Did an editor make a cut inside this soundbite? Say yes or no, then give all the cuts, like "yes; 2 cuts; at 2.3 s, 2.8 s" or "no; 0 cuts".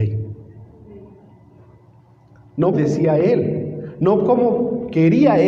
yes; 1 cut; at 2.7 s